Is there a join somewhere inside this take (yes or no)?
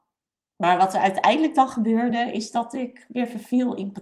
no